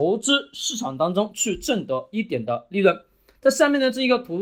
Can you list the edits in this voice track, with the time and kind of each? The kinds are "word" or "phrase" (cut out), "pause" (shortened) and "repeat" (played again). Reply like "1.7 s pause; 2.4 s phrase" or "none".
none